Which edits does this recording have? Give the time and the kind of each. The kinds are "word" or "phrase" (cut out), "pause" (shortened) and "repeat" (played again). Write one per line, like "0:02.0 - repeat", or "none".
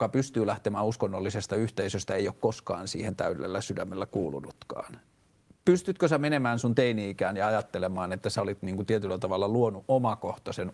none